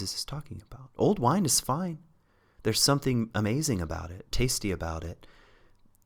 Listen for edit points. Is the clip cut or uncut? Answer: uncut